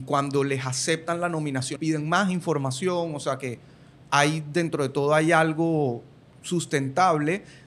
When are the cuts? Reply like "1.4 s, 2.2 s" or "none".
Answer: 1.8 s